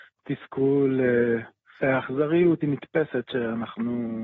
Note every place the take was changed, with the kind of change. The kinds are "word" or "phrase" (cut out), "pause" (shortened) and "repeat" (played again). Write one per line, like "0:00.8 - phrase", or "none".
0:01.8 - word
0:02.6 - word